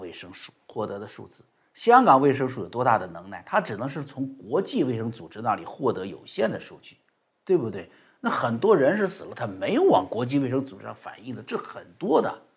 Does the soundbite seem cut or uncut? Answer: uncut